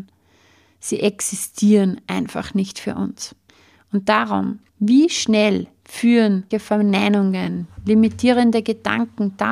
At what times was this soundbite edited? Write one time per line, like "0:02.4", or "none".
0:03.5
0:04.7
0:06.5